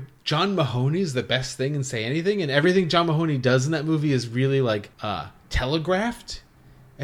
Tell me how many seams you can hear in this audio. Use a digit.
1